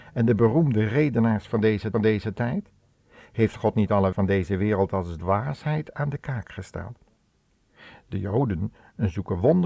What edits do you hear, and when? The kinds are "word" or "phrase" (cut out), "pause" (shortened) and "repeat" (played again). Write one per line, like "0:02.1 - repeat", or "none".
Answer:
0:01.9 - repeat
0:04.1 - word